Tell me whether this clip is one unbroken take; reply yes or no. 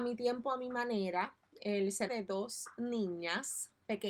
no